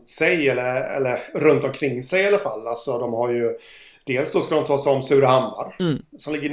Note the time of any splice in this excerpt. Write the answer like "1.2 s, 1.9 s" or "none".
none